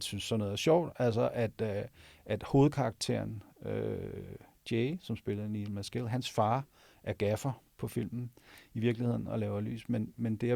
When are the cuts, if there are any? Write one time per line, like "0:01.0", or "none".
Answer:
none